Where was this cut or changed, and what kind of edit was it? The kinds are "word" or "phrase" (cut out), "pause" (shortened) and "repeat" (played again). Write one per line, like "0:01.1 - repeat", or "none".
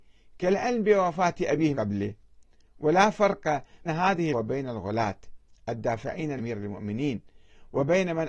0:01.7 - word
0:03.9 - word
0:04.3 - word
0:06.4 - word